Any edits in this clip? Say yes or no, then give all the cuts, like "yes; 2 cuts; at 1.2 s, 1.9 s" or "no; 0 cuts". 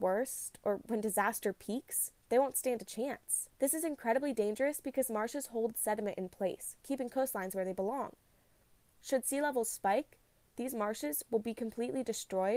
yes; 2 cuts; at 2.2 s, 3.5 s